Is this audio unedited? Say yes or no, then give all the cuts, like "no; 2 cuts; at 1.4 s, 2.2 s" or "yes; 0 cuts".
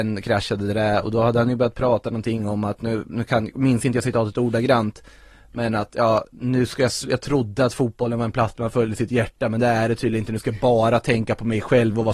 yes; 0 cuts